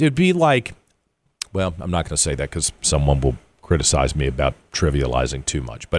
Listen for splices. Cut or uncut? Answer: uncut